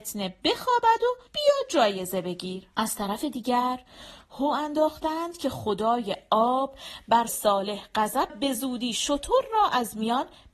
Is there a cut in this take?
yes; 4 cuts; at 1.3 s, 2.7 s, 7.3 s, 8.3 s

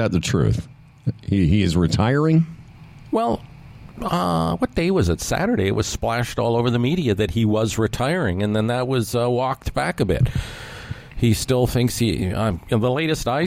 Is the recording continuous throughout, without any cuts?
yes; 0 cuts

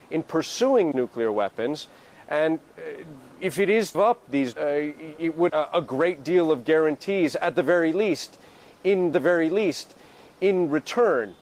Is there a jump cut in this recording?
yes; 6 cuts; at 0.9 s, 3.3 s, 3.9 s, 4.5 s, 5.5 s, 9.1 s

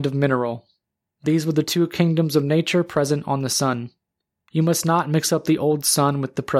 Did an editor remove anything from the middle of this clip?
no; 0 cuts

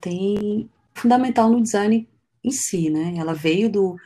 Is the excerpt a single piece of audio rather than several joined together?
no; 1 cut; at 1.0 s

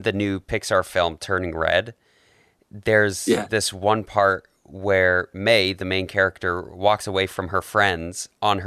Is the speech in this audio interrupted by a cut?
no; 0 cuts

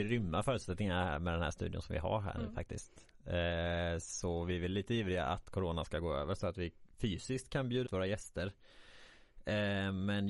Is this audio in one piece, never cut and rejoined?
no; 1 cut; at 7.9 s

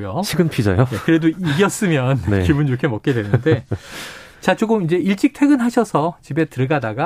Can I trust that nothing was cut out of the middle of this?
yes; 0 cuts

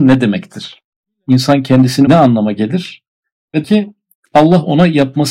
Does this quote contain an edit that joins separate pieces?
yes; 2 cuts; at 2.1 s, 3.6 s

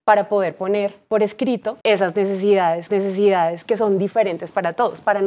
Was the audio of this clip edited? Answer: yes; 2 cuts; at 1.8 s, 2.9 s

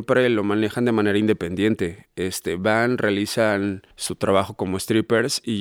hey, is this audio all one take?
no; 1 cut; at 3.9 s

